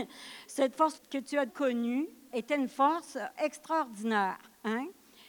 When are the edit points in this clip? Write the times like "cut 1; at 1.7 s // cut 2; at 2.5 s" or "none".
cut 1; at 0.9 s // cut 2; at 1.5 s // cut 3; at 2.3 s // cut 4; at 3.4 s